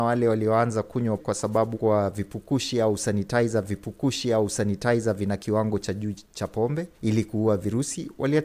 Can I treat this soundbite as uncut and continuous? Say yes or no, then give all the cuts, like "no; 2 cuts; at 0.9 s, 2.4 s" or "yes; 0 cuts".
no; 4 cuts; at 1.2 s, 1.7 s, 3.6 s, 6.9 s